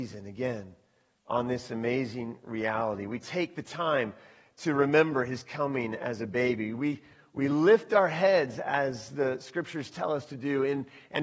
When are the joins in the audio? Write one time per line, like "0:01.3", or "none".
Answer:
none